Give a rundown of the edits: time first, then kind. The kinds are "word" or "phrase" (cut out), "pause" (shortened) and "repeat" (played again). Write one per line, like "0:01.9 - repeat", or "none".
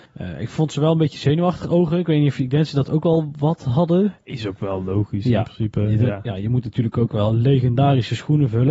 none